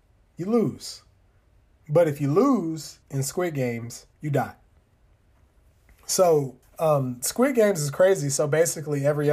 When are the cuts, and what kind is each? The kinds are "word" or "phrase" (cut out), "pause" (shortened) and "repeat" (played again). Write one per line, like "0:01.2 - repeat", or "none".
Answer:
0:03.0 - pause
0:04.1 - pause
0:06.6 - pause